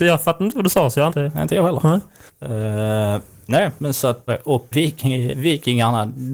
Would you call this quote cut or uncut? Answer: cut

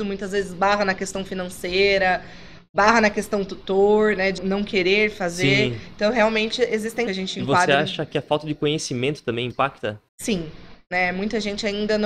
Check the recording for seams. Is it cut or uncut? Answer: cut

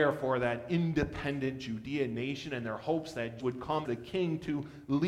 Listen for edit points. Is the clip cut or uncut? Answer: cut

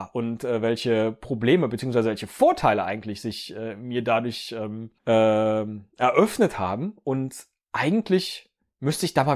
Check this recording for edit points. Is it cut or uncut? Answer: cut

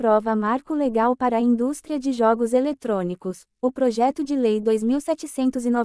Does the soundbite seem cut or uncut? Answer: uncut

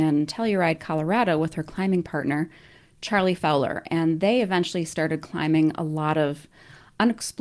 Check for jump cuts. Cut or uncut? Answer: uncut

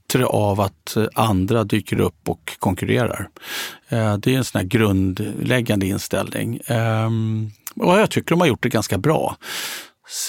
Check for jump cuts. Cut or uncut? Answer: uncut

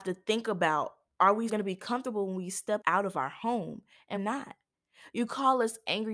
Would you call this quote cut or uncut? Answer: cut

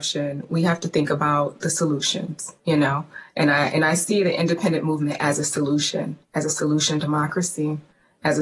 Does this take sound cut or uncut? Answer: cut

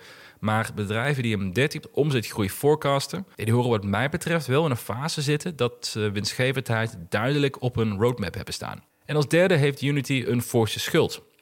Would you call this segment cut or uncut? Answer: cut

